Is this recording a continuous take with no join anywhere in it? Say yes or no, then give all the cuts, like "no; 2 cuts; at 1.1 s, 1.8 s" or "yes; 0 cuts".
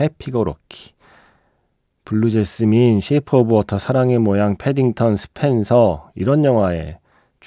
yes; 0 cuts